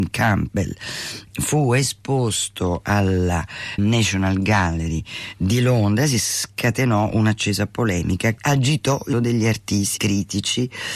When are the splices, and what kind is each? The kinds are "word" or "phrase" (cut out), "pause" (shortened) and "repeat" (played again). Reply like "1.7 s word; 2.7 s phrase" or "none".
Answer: 3.8 s word; 8.4 s word; 9.1 s word; 10.0 s word